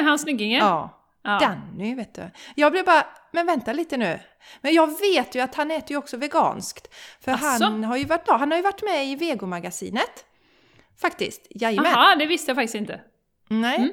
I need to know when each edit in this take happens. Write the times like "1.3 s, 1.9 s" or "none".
8.3 s